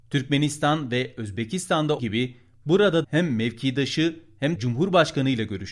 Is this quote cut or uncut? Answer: cut